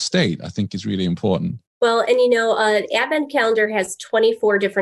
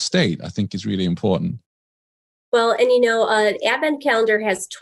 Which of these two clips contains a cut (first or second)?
first